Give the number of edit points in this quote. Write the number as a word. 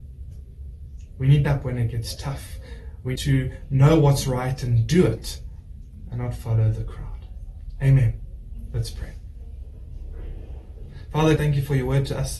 three